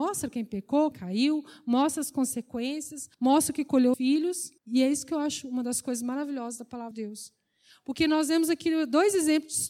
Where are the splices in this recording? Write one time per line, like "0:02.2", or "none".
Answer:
0:00.9
0:03.1
0:03.9
0:04.6
0:06.9